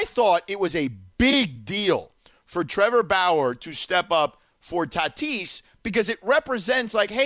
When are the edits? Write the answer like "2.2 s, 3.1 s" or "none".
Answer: none